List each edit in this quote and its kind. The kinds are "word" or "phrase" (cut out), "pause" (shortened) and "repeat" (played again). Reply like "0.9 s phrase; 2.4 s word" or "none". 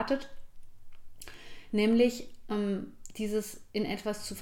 none